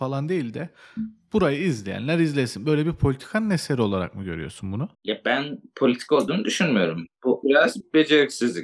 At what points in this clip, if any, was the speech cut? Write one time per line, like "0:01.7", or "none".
0:04.9
0:07.4